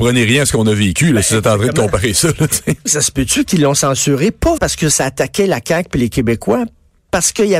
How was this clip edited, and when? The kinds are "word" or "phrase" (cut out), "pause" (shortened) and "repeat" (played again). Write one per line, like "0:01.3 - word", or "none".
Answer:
0:02.9 - word
0:04.6 - word